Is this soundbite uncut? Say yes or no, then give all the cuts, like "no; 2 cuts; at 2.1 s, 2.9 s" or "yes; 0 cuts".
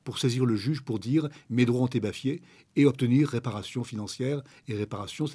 yes; 0 cuts